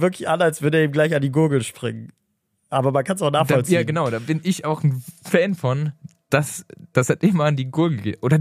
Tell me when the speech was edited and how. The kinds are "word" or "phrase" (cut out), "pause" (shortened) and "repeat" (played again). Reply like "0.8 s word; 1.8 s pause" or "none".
none